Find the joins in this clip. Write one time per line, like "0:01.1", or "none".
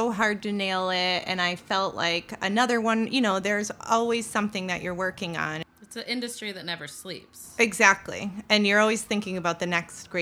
none